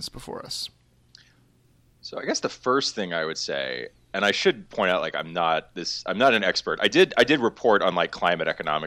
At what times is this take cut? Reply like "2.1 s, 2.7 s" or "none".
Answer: none